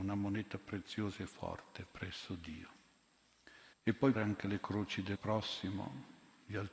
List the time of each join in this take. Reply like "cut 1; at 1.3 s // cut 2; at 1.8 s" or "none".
cut 1; at 3.7 s // cut 2; at 4.1 s // cut 3; at 5.1 s